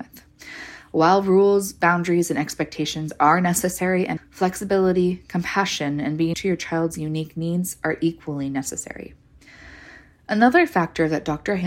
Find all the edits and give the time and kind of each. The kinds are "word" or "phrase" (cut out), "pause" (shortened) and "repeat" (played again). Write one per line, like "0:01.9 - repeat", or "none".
0:04.2 - word
0:06.3 - word